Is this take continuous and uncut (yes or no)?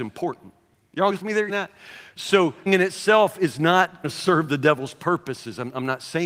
no